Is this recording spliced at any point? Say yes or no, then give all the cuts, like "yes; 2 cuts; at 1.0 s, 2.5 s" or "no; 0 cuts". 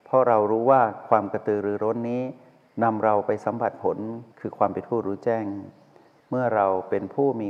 yes; 1 cut; at 4.3 s